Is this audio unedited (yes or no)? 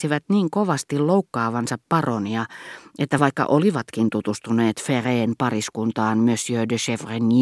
yes